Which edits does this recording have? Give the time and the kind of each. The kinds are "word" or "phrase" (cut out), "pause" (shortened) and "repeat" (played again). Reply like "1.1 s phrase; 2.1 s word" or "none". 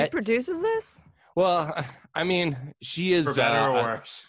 none